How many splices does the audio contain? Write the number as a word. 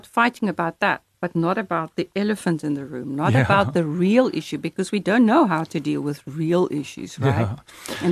zero